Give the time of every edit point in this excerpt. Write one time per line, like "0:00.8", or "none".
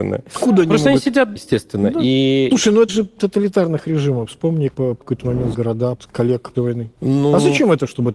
0:01.4
0:02.9
0:04.7
0:05.0
0:05.5
0:06.0
0:06.5